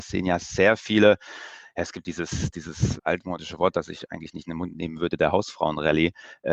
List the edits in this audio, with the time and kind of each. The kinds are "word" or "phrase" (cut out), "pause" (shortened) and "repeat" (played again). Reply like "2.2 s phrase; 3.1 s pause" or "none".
3.0 s word